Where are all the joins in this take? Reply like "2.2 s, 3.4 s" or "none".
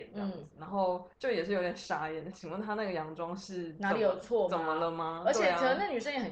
1.1 s, 2.3 s